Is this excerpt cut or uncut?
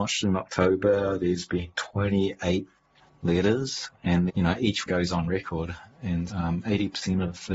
cut